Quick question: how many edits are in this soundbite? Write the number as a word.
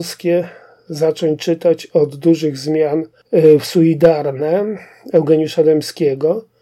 zero